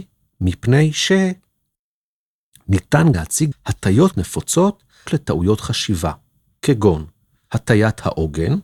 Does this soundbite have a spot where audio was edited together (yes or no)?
yes